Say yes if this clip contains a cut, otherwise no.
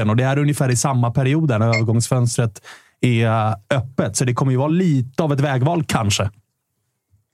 no